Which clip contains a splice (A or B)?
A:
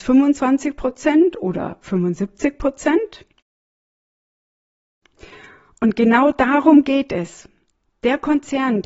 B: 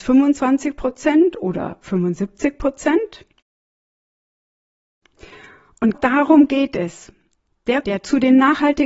B